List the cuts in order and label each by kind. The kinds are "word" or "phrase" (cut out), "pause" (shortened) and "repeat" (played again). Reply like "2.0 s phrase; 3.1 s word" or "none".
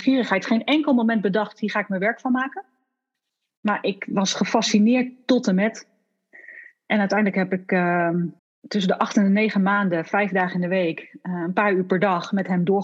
8.4 s pause